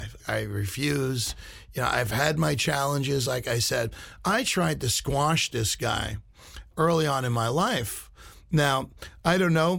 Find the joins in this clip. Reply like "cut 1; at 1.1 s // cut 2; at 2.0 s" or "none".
none